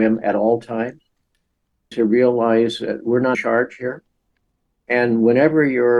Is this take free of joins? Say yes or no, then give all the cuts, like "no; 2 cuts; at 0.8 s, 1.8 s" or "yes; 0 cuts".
no; 2 cuts; at 1.9 s, 3.3 s